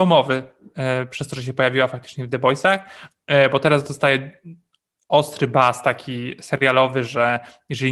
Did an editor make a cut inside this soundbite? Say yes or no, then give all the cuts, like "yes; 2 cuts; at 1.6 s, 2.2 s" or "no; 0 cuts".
no; 0 cuts